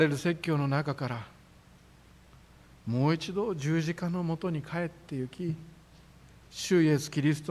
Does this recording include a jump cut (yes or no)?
no